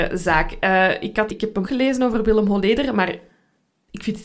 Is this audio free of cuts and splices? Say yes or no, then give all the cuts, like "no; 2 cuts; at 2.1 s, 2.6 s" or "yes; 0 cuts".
no; 2 cuts; at 1.3 s, 1.6 s